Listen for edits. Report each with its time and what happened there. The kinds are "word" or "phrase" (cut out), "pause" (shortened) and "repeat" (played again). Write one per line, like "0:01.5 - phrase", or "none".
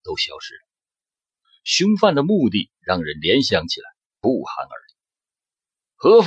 none